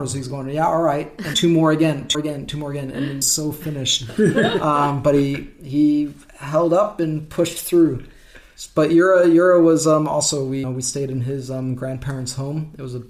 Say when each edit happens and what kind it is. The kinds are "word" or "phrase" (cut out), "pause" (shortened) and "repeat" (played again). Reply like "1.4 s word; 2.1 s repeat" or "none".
1.3 s word; 2.1 s word; 3.2 s phrase; 10.6 s phrase